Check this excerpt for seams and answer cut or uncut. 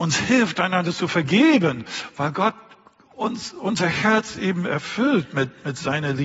uncut